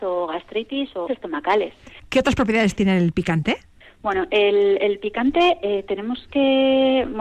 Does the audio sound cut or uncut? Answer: cut